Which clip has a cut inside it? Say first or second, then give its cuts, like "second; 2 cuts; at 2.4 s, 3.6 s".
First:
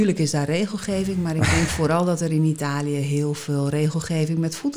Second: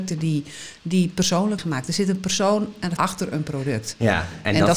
second; 2 cuts; at 1.6 s, 3.0 s